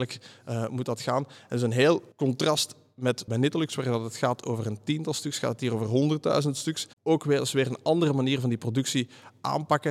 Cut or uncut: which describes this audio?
cut